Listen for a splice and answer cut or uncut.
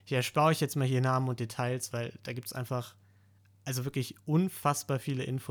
uncut